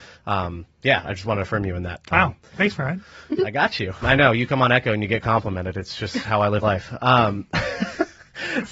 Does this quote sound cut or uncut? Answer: cut